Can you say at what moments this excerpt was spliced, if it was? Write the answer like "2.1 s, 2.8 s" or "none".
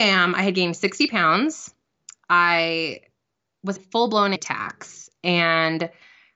3.8 s, 4.3 s